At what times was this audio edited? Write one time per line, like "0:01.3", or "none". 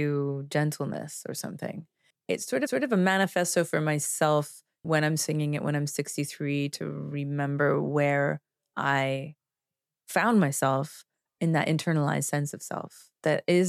0:02.7